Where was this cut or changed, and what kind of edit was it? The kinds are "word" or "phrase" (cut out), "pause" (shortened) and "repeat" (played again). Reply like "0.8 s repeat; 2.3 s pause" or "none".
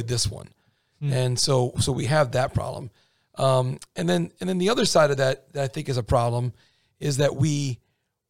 none